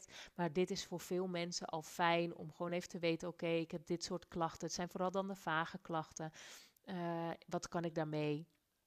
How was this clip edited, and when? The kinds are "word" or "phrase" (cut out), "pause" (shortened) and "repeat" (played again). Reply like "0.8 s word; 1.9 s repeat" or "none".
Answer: none